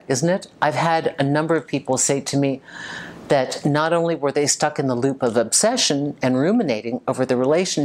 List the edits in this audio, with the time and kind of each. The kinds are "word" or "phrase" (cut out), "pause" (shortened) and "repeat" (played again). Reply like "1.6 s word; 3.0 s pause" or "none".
none

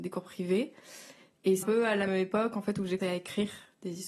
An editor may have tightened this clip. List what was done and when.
1.6 s word; 2.1 s word; 3.0 s word

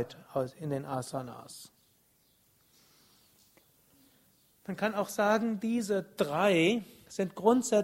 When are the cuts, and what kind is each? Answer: none

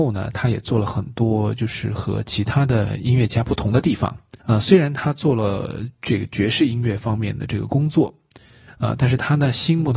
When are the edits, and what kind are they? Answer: 4.4 s pause

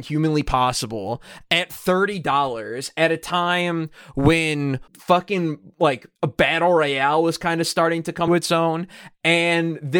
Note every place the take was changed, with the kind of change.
4.9 s pause; 6.2 s pause; 8.3 s word

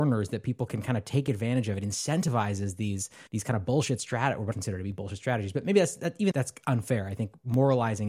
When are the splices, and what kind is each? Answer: 3.3 s pause; 4.5 s phrase; 6.3 s word

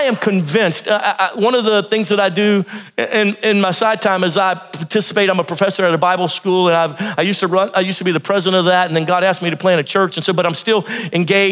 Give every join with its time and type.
none

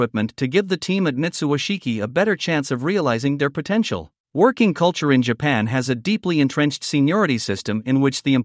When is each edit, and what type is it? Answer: 4.2 s pause

